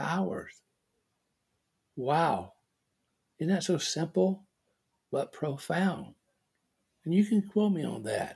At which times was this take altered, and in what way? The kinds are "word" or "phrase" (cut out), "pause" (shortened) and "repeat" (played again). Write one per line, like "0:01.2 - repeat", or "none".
none